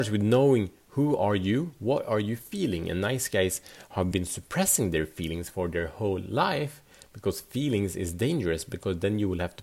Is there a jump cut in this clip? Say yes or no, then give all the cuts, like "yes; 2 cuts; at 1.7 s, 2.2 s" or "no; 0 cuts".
no; 0 cuts